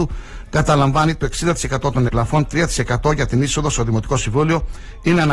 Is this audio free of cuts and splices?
no; 1 cut; at 2.1 s

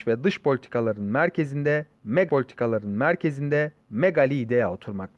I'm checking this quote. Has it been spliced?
yes; 1 cut; at 2.3 s

